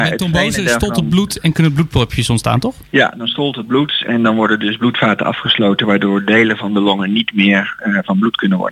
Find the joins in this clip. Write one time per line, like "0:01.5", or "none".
0:01.4